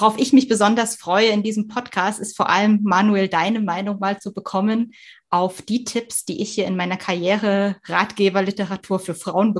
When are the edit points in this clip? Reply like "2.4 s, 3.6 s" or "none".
none